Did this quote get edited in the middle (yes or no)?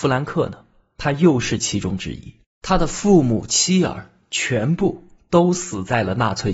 yes